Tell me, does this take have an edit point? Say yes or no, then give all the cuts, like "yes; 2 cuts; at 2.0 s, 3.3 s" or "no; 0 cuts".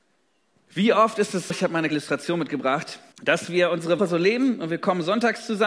yes; 4 cuts; at 1.5 s, 1.9 s, 3.1 s, 4.0 s